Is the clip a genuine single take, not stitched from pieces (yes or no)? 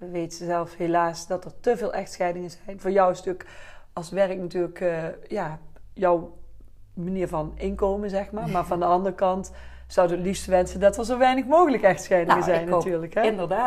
yes